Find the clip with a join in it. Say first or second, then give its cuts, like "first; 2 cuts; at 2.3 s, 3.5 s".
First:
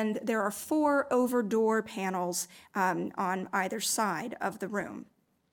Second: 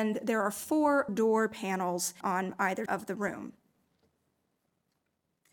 second; 3 cuts; at 1.1 s, 2.2 s, 2.9 s